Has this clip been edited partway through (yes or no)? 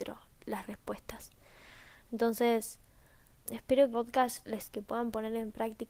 yes